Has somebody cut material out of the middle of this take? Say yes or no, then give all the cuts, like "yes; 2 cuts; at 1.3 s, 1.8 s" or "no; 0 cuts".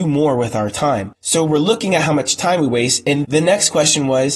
yes; 1 cut; at 3.2 s